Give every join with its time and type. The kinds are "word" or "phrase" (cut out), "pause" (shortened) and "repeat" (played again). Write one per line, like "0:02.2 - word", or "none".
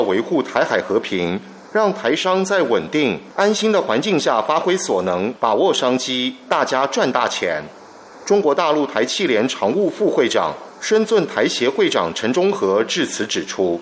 none